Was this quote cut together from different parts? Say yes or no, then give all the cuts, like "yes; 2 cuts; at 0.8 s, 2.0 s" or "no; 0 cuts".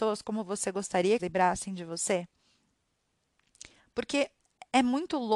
yes; 1 cut; at 1.2 s